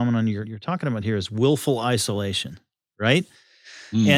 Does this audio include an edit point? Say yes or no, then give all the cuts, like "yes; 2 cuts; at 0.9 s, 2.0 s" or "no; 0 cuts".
no; 0 cuts